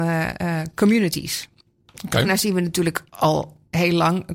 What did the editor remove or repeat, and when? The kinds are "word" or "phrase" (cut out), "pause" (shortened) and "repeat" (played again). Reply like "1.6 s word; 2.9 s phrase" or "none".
none